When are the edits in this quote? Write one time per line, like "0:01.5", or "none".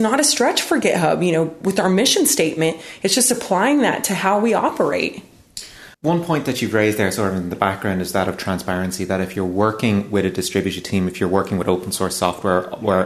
0:05.9